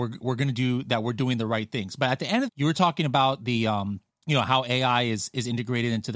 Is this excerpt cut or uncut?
cut